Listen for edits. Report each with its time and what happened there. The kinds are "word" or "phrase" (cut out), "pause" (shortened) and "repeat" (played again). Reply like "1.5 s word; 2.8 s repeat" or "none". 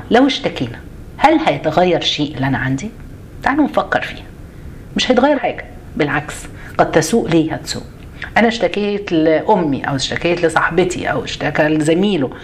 2.3 s word; 5.3 s word; 7.2 s word